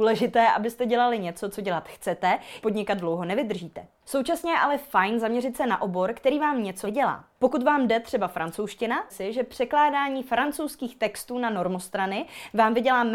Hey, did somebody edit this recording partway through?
yes; 3 cuts; at 2.6 s, 6.8 s, 9.1 s

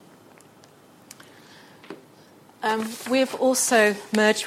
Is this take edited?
no; 0 cuts

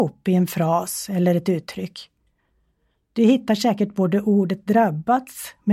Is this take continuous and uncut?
yes; 0 cuts

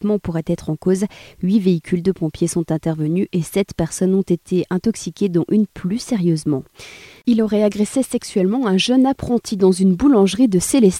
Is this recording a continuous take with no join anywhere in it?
yes; 0 cuts

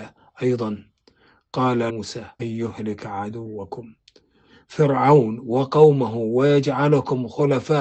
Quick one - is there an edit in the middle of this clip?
yes; 2 cuts; at 1.9 s, 2.4 s

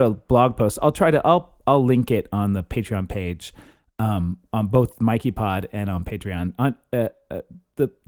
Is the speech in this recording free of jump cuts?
yes; 0 cuts

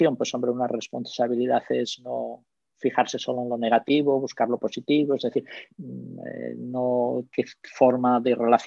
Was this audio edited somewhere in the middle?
no; 0 cuts

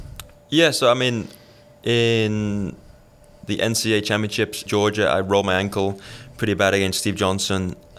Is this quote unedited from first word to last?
no; 1 cut; at 4.7 s

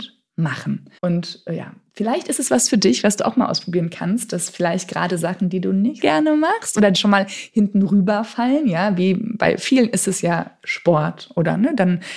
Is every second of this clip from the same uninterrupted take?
no; 3 cuts; at 1.0 s, 6.0 s, 6.9 s

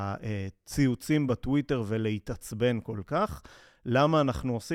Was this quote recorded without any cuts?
yes; 0 cuts

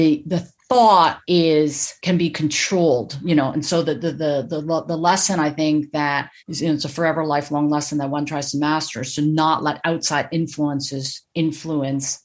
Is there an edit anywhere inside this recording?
yes; 1 cut; at 6.4 s

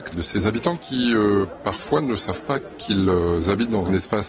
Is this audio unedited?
yes; 0 cuts

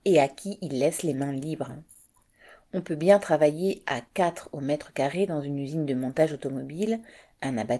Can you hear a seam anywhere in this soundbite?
no; 0 cuts

